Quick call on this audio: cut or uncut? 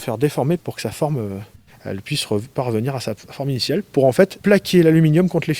uncut